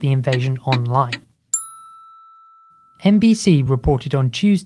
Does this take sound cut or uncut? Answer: uncut